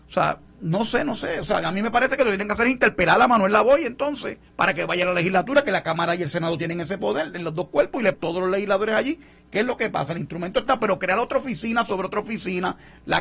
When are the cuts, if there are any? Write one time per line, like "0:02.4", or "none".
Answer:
0:04.5
0:08.1